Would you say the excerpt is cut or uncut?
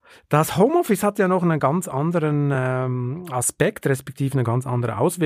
uncut